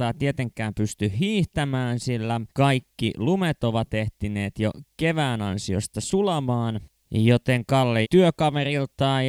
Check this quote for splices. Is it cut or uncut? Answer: cut